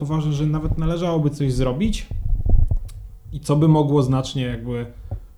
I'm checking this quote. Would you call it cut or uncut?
uncut